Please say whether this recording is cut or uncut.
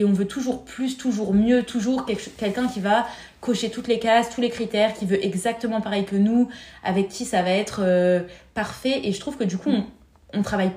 uncut